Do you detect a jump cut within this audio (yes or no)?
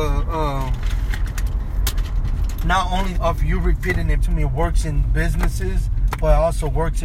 yes